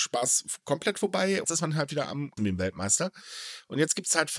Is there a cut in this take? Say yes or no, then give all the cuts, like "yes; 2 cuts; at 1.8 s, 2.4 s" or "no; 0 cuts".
yes; 2 cuts; at 1.4 s, 2.4 s